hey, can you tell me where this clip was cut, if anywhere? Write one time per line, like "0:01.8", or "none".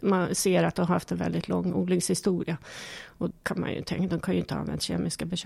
0:03.3